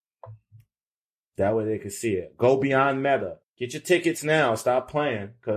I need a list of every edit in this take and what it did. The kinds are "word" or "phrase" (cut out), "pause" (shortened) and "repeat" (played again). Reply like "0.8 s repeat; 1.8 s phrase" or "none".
3.4 s pause